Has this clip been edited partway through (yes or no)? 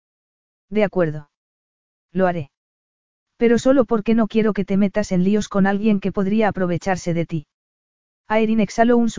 no